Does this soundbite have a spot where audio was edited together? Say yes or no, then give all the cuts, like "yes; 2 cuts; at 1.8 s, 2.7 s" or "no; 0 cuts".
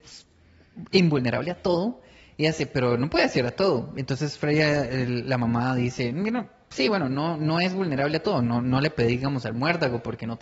no; 0 cuts